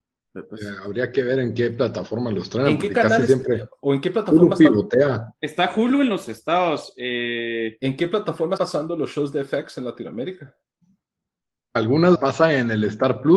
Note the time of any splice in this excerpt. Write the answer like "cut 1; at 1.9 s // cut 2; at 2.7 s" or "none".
cut 1; at 8.6 s // cut 2; at 12.1 s